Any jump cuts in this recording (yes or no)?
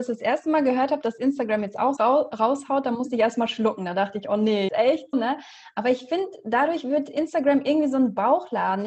yes